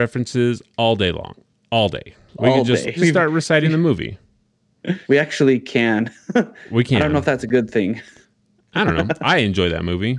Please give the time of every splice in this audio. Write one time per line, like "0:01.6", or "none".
0:03.0
0:05.0

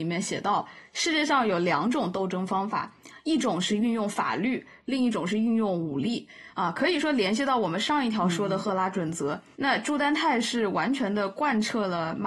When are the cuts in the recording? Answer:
0:09.5

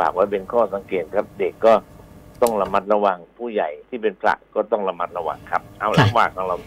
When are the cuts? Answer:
0:03.8

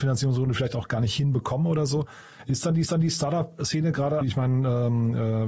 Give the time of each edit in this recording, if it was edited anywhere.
0:02.8
0:04.2

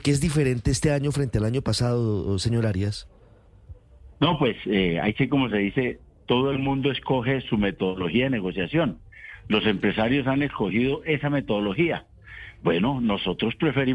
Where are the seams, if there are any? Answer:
0:04.1

